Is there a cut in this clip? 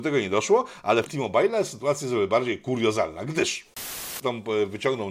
yes; 2 cuts; at 1.1 s, 4.2 s

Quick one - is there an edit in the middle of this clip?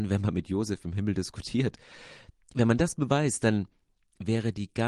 no; 0 cuts

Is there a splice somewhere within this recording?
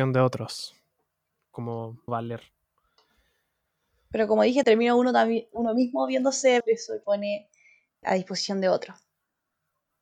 yes; 5 cuts; at 2.1 s, 4.6 s, 6.6 s, 7.0 s, 8.0 s

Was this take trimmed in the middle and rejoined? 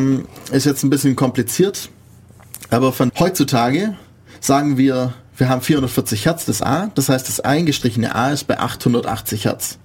yes; 1 cut; at 3.1 s

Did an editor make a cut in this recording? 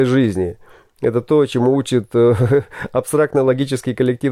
no; 0 cuts

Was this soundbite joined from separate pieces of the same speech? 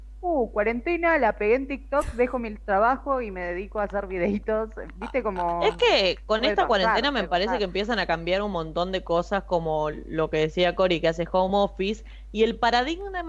no; 0 cuts

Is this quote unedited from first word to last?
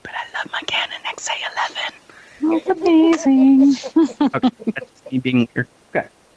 yes; 0 cuts

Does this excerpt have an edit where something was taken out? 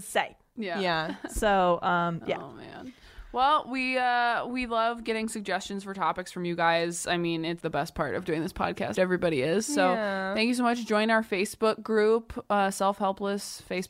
yes; 2 cuts; at 7.6 s, 9.0 s

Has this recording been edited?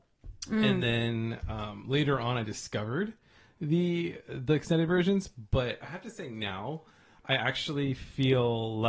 no; 0 cuts

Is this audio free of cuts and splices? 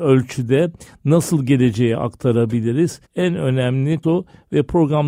no; 2 cuts; at 3.0 s, 4.0 s

